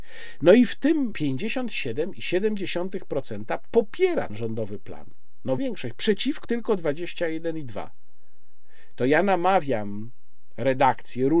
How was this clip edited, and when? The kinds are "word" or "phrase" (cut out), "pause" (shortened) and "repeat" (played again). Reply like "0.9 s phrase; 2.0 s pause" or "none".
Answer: 1.1 s word; 4.3 s word; 5.6 s word; 6.4 s word